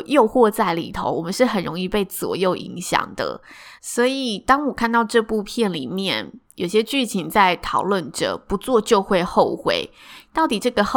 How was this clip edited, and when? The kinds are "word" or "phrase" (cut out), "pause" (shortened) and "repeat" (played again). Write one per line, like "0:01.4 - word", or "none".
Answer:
0:03.8 - pause